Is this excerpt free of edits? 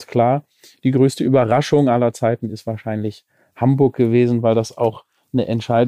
yes; 0 cuts

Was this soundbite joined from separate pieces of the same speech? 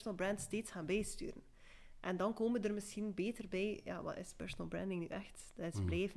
no; 0 cuts

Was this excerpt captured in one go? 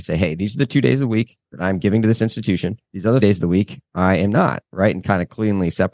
no; 3 cuts; at 1.4 s, 2.8 s, 3.2 s

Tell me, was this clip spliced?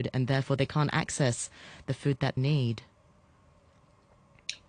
yes; 1 cut; at 2.4 s

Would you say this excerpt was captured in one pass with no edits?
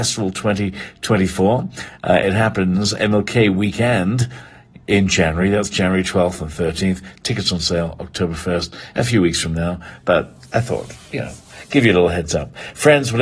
yes; 0 cuts

